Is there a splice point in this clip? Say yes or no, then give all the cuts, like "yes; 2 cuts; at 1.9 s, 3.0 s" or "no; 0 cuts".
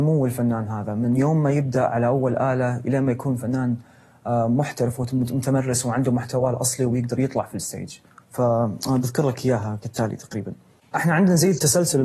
no; 0 cuts